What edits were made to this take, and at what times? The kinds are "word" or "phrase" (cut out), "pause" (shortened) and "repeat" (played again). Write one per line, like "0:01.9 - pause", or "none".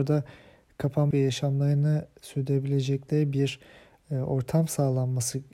0:01.1 - phrase